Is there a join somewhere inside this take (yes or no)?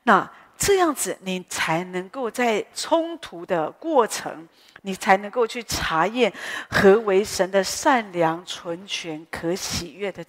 no